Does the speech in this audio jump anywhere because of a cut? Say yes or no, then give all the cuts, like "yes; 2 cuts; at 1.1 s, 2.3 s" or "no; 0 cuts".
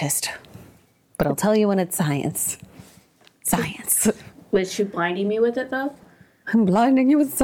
no; 0 cuts